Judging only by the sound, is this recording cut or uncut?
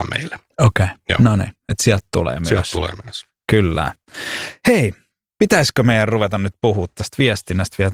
uncut